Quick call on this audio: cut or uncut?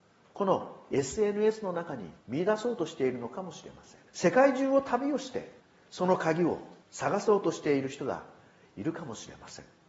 cut